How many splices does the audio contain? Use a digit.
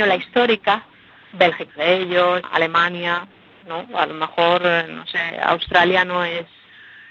2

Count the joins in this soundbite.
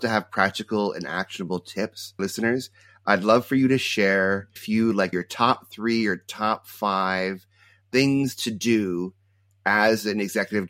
3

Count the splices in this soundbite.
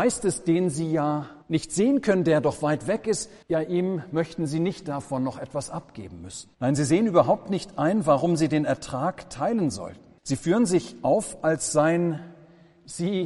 4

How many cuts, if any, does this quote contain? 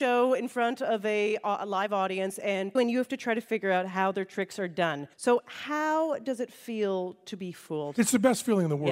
2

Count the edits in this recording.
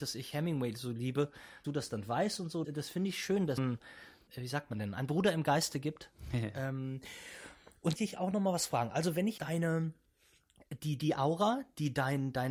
6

